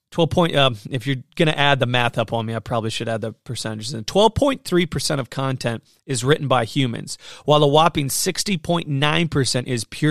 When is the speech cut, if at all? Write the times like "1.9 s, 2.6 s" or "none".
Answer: none